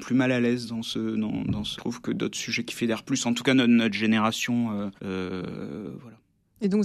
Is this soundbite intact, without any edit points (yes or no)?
no